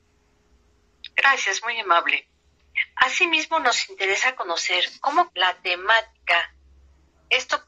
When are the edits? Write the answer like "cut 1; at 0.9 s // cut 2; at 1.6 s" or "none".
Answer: cut 1; at 1.1 s // cut 2; at 5.3 s

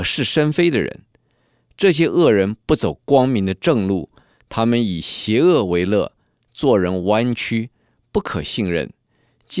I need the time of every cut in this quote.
none

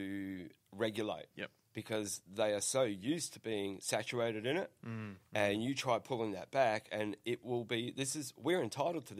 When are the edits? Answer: cut 1; at 1.3 s

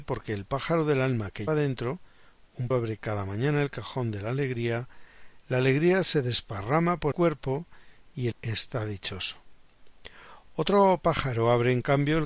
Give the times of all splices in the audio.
cut 1; at 1.5 s // cut 2; at 2.7 s // cut 3; at 7.1 s // cut 4; at 8.3 s

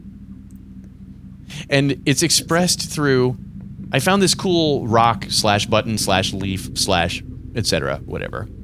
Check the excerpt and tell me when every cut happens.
none

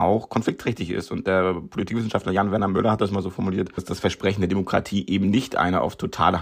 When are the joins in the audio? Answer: none

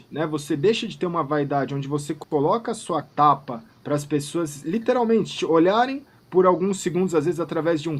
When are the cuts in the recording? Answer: cut 1; at 3.0 s // cut 2; at 3.7 s

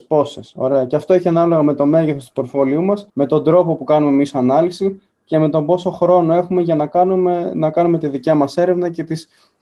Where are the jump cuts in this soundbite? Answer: cut 1; at 3.1 s

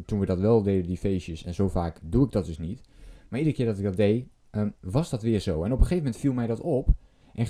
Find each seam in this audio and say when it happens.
cut 1; at 2.0 s // cut 2; at 4.8 s

